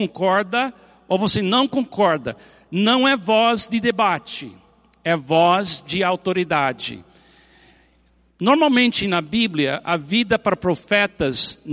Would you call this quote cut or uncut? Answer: uncut